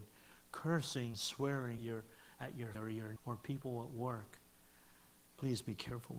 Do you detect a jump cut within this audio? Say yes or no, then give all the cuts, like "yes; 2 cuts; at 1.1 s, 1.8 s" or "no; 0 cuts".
yes; 4 cuts; at 1.1 s, 1.8 s, 2.7 s, 3.2 s